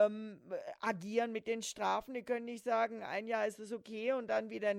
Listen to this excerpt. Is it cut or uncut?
uncut